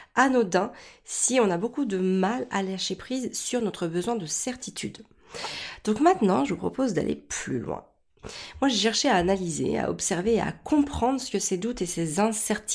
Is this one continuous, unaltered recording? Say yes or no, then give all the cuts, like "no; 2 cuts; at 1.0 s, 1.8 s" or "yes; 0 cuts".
yes; 0 cuts